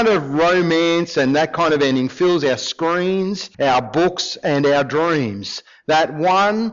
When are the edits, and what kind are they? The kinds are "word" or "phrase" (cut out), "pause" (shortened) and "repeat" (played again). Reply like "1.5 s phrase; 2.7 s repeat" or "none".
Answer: 3.5 s pause